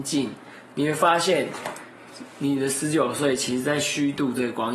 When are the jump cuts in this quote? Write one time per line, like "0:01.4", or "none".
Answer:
none